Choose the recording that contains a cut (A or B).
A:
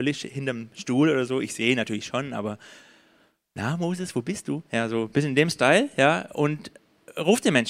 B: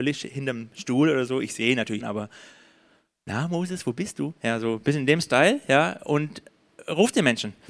B